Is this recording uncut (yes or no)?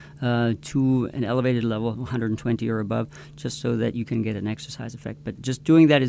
yes